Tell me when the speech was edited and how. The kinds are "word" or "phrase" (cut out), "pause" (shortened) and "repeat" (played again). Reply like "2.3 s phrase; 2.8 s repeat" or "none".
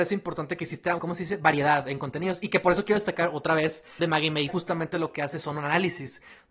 1.0 s word; 4.0 s phrase; 4.5 s phrase